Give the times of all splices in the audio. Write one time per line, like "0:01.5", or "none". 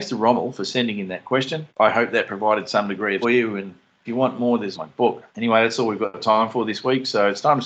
0:01.7
0:03.2
0:04.1
0:04.7
0:05.3